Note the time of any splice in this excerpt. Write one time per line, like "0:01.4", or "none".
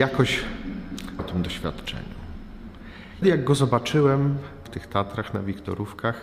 0:01.2
0:03.2
0:04.6